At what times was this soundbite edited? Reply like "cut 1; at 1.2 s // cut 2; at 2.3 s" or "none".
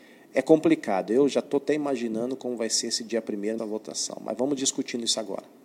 cut 1; at 3.6 s